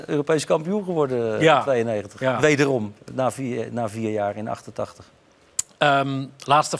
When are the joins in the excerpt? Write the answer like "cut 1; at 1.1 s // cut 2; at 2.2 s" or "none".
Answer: none